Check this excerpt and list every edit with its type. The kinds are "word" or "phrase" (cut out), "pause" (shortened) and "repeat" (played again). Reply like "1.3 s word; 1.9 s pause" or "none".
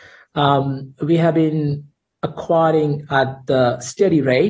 none

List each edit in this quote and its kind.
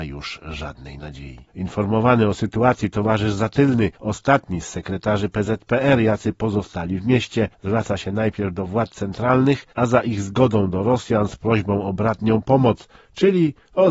1.5 s pause; 3.9 s pause; 7.5 s pause; 9.7 s pause

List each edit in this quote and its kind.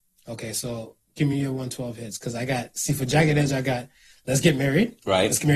none

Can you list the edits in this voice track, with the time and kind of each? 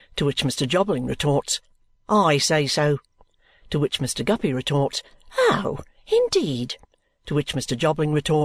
none

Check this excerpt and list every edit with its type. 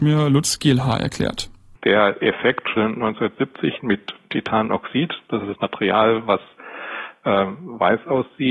2.8 s word; 3.8 s word; 5.5 s word

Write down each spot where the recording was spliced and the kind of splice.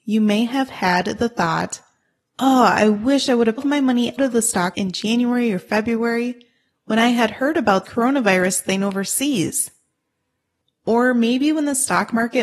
3.6 s phrase; 4.2 s word; 4.7 s word; 7.8 s word

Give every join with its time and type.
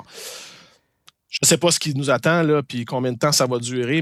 none

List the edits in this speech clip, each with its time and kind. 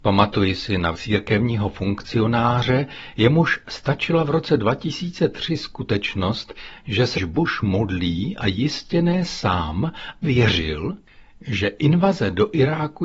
0.9 s word; 7.1 s word; 10.2 s word

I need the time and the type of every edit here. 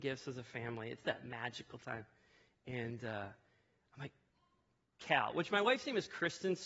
none

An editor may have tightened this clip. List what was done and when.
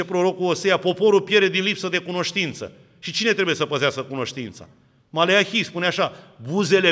none

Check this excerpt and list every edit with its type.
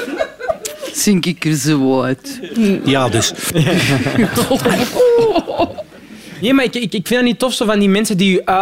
none

